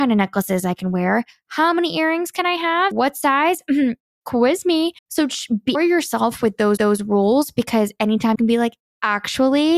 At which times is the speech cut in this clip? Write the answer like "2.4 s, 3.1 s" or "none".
2.9 s, 5.0 s, 5.7 s, 6.8 s, 8.3 s